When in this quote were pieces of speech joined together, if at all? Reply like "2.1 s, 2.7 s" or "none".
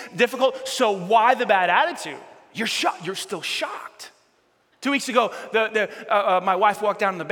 none